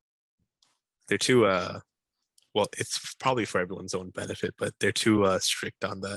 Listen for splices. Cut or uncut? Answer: uncut